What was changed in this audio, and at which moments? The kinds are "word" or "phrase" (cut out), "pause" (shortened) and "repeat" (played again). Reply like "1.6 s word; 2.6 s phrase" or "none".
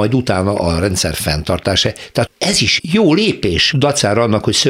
2.3 s word; 2.8 s word; 3.7 s word